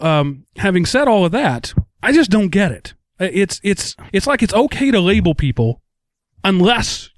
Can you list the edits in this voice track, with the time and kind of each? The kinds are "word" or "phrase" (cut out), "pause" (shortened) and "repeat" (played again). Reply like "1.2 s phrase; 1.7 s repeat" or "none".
1.9 s pause; 4.1 s pause